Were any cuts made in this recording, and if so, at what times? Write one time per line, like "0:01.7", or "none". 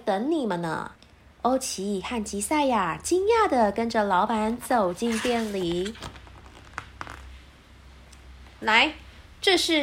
0:00.9

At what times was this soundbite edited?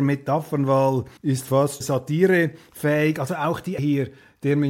0:01.2
0:01.8
0:03.8

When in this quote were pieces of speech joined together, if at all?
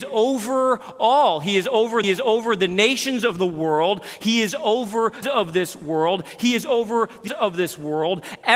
0:02.0
0:05.2
0:07.3

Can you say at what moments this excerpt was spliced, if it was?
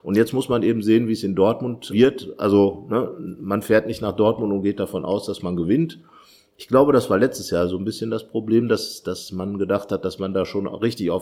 0:01.9

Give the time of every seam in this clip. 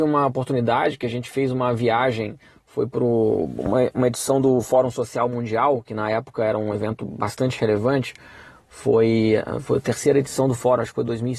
none

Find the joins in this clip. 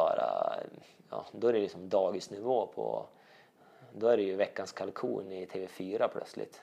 none

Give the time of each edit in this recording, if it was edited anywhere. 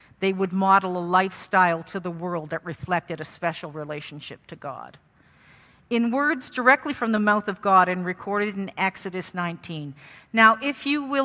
none

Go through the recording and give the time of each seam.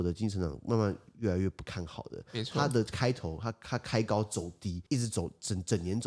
0:04.9

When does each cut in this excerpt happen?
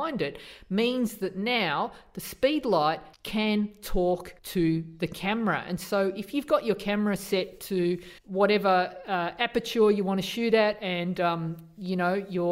0:03.1
0:04.4
0:08.2

